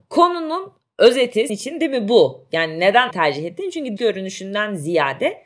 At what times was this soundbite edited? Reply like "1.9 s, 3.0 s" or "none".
1.5 s, 3.1 s, 4.0 s